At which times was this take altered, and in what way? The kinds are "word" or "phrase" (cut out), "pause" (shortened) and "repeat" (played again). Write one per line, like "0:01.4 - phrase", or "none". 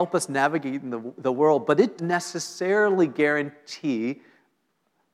0:01.1 - word
0:02.0 - word

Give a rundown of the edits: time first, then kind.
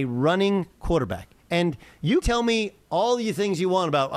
0:02.2 - word

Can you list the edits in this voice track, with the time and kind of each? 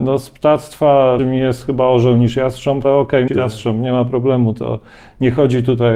0:01.2 - word
0:02.8 - word
0:03.3 - phrase

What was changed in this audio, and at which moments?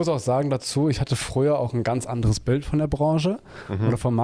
none

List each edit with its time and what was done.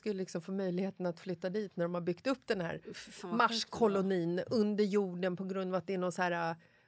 none

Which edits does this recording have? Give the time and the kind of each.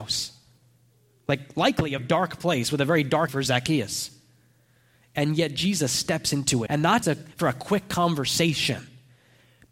0:02.0 - word
0:03.3 - word
0:06.7 - word
0:07.0 - word

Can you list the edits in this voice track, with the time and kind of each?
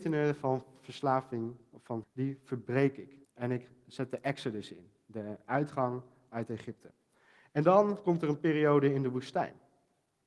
0:02.0 - word
0:03.2 - pause

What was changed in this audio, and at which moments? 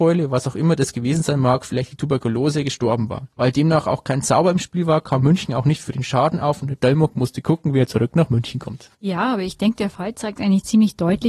0:03.3 - pause
0:08.9 - pause

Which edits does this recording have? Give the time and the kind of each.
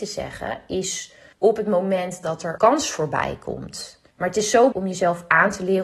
0:01.3 - pause
0:02.6 - word
0:04.1 - pause
0:04.7 - word

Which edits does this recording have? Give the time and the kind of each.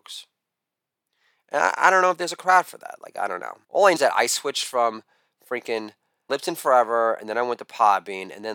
0:03.6 - pause
0:04.0 - word
0:06.3 - phrase

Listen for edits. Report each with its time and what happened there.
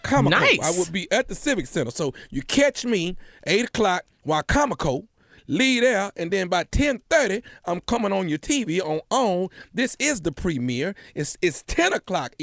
none

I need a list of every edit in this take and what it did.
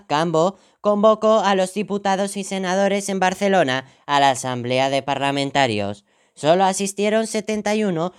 none

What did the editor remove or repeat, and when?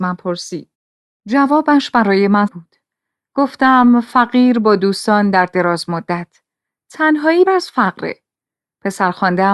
0:02.5 - word
0:07.5 - word

